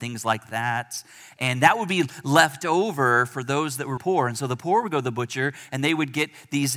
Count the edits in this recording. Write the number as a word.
one